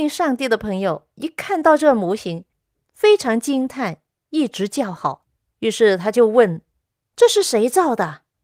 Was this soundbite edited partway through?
no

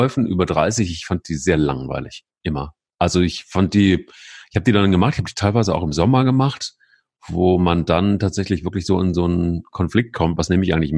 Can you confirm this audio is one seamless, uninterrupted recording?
yes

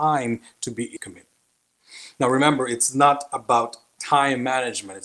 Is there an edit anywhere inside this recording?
yes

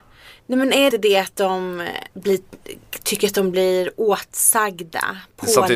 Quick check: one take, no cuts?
no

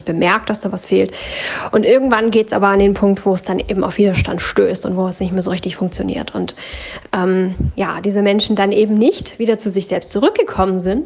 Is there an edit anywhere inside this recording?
no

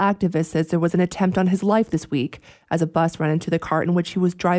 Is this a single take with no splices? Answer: yes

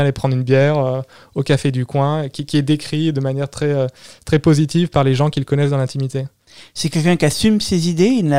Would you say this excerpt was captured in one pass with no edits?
yes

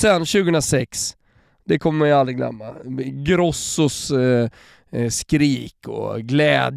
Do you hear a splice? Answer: no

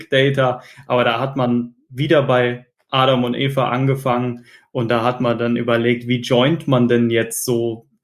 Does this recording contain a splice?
no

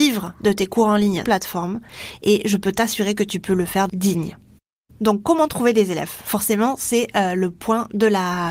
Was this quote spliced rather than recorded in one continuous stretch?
yes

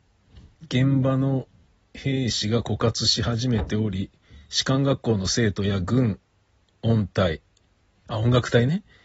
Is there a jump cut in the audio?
no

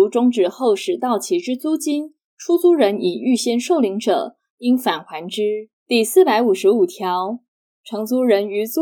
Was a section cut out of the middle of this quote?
yes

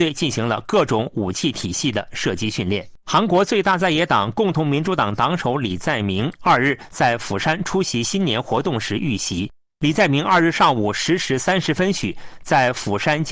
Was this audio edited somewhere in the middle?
yes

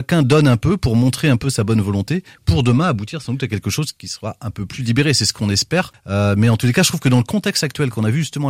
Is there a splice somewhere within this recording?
no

